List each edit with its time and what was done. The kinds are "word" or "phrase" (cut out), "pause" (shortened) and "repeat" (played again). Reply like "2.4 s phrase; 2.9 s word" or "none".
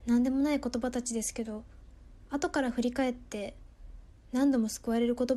4.1 s pause